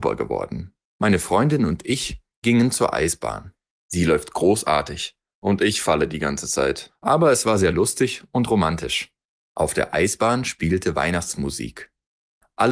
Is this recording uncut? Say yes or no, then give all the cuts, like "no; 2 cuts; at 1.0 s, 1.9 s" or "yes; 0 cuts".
yes; 0 cuts